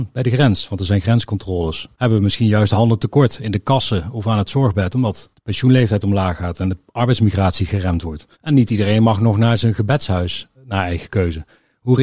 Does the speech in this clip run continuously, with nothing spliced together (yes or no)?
no